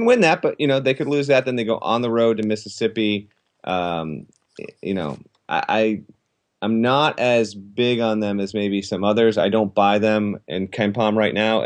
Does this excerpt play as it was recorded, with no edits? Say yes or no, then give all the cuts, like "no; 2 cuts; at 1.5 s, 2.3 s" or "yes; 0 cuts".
yes; 0 cuts